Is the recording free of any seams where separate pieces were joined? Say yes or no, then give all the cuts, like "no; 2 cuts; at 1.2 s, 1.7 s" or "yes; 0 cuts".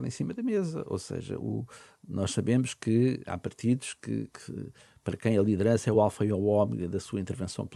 yes; 0 cuts